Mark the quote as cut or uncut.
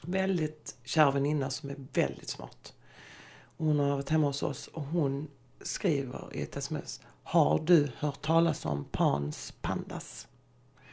cut